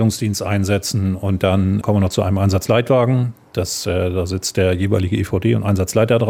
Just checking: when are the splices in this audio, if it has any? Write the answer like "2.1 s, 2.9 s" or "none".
1.8 s